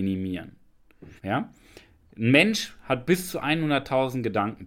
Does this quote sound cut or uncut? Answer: cut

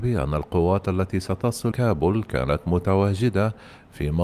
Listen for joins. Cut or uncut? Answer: cut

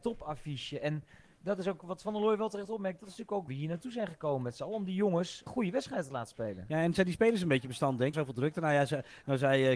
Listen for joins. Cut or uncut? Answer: cut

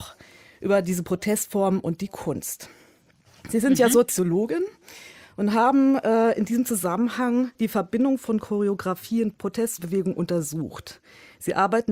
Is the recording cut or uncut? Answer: cut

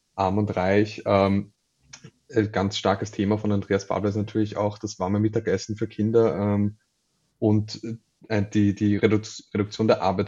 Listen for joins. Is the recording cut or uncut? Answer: uncut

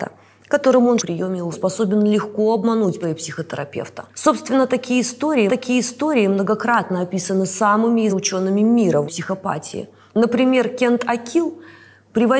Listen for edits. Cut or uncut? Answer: cut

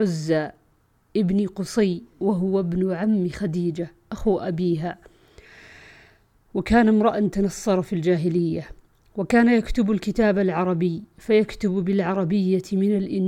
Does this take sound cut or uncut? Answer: uncut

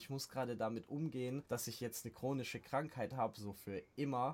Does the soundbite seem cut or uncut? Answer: cut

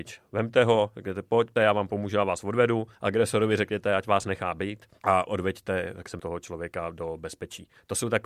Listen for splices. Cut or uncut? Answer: cut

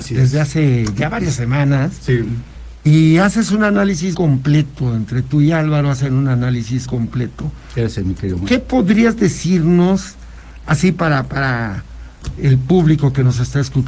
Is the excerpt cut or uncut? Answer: cut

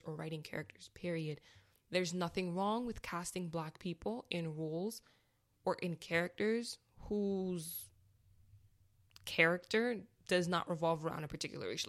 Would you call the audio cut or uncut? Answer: uncut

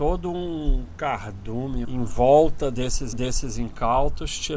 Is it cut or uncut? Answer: cut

